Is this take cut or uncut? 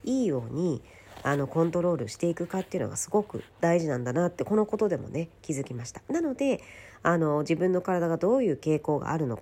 cut